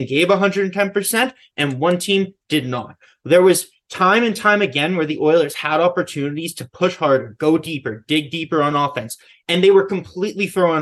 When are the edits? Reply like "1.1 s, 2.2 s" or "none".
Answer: none